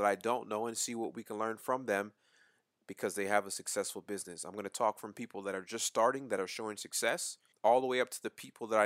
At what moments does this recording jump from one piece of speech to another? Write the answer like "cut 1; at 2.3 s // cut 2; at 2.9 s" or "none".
cut 1; at 7.5 s